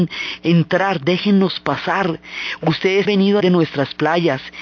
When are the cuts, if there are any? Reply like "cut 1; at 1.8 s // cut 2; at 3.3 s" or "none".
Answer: cut 1; at 3.1 s // cut 2; at 3.4 s